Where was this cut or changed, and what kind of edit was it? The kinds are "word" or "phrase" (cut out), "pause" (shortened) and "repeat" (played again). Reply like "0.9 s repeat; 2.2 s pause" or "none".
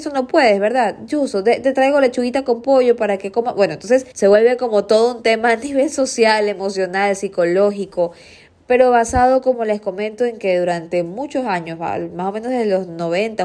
4.1 s pause